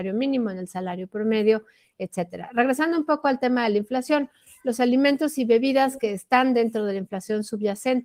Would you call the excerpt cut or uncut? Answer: uncut